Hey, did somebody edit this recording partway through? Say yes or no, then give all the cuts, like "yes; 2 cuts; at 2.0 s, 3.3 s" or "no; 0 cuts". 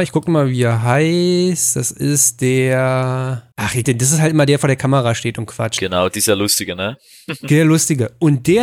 yes; 2 cuts; at 3.5 s, 3.8 s